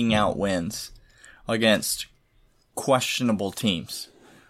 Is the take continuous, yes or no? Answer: yes